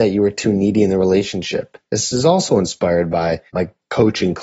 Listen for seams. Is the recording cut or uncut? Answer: cut